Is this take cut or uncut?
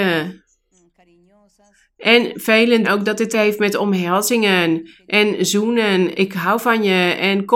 cut